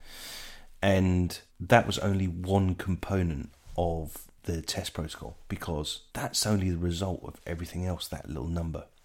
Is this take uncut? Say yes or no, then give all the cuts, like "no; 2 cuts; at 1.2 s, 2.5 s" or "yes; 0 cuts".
no; 2 cuts; at 1.5 s, 6.1 s